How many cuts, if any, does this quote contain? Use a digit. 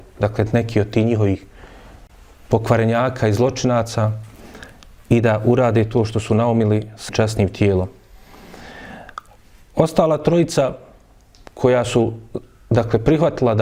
1